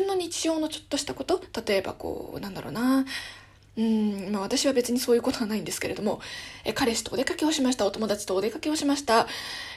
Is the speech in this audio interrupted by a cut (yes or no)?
no